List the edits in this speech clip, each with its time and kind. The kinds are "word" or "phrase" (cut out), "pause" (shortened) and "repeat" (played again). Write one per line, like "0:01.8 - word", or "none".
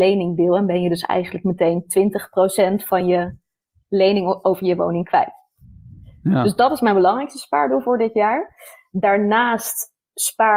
none